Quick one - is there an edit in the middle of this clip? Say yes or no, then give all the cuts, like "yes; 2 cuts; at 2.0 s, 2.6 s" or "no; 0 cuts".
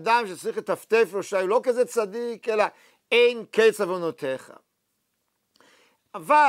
no; 0 cuts